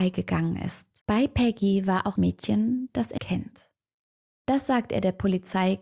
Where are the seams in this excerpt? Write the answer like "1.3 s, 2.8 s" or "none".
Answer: 1.0 s, 2.2 s, 3.2 s